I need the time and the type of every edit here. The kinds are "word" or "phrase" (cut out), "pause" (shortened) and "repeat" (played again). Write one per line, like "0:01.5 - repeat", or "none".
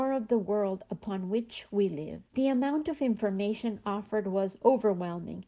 0:02.3 - pause

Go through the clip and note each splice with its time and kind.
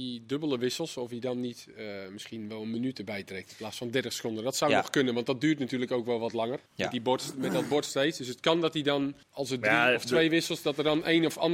0:06.7 - pause
0:09.2 - pause

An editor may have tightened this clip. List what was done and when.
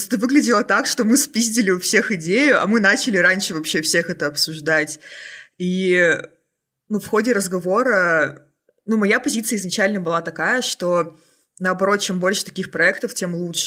none

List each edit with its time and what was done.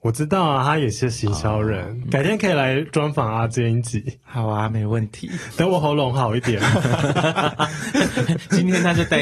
0:02.0 - word

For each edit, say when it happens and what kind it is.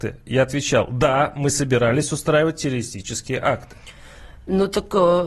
none

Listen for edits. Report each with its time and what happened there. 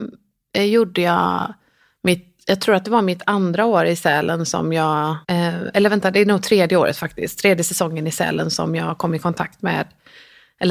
0:05.2 - pause

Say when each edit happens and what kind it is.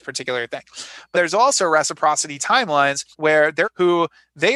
0:01.1 - word
0:03.1 - pause
0:03.6 - phrase

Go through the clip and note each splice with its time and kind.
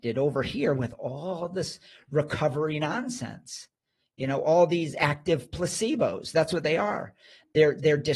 none

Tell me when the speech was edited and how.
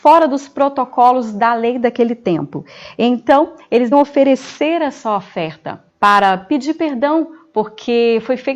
0:03.9 - word
0:05.9 - pause

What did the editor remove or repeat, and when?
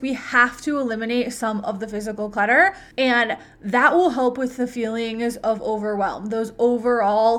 0:02.9 - pause

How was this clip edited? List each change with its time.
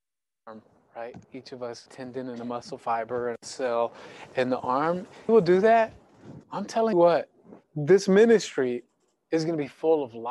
0:01.2 - pause
0:01.9 - phrase
0:05.3 - phrase
0:06.4 - pause
0:06.9 - word
0:07.6 - pause

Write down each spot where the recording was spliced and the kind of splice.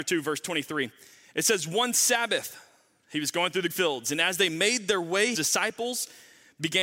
0:03.7 - word
0:05.3 - word

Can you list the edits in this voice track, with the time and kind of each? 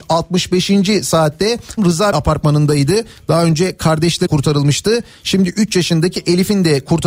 0:01.8 - word
0:02.1 - word
0:04.3 - word

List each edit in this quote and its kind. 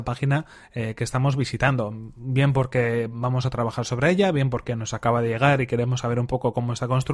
none

